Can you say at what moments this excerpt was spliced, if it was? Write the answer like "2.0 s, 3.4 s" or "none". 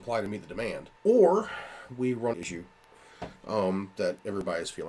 1.0 s, 2.3 s